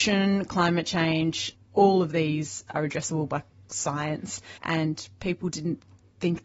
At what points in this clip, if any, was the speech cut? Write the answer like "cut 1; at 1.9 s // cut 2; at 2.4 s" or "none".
cut 1; at 2.7 s // cut 2; at 4.6 s // cut 3; at 5.5 s